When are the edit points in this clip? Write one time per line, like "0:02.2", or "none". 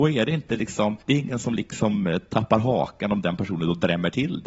0:01.0